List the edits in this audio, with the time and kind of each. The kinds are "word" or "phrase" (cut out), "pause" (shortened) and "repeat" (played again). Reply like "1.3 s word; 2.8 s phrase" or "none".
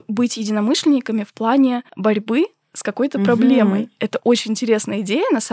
none

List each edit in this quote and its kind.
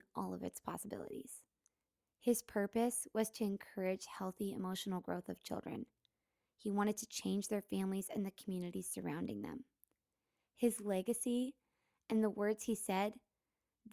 none

